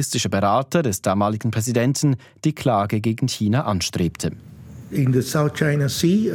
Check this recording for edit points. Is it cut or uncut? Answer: uncut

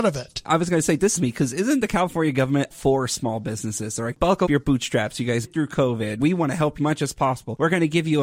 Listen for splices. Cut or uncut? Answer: cut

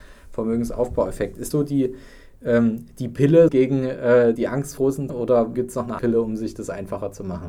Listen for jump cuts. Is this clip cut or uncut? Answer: cut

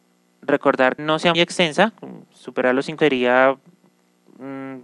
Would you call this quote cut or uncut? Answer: cut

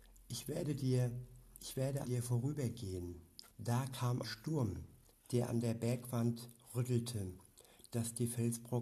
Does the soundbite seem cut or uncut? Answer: cut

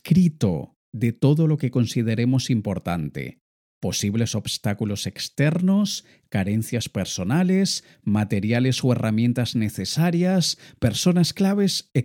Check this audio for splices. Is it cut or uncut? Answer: uncut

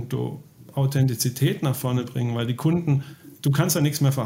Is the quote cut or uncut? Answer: cut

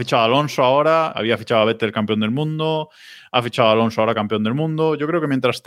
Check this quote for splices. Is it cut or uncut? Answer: cut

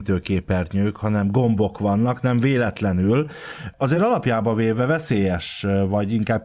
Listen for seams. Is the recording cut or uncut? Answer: uncut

